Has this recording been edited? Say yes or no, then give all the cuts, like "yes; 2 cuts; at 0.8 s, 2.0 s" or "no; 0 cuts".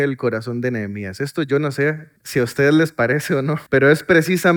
yes; 2 cuts; at 2.2 s, 3.7 s